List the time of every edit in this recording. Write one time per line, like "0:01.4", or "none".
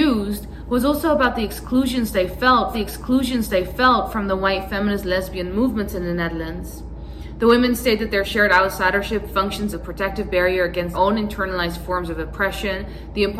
0:02.7
0:09.7
0:10.9